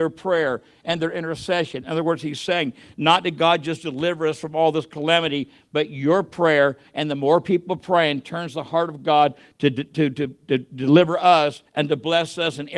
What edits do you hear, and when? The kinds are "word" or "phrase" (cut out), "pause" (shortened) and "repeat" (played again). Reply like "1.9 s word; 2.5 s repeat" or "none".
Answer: none